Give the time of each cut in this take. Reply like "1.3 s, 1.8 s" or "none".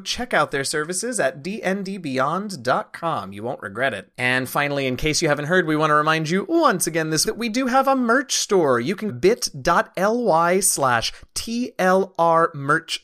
7.2 s, 9.1 s